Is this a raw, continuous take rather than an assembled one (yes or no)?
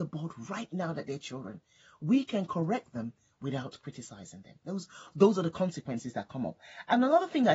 yes